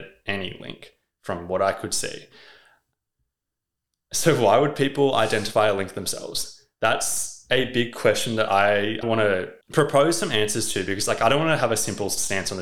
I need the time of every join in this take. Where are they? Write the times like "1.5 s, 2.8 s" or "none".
9.0 s, 9.6 s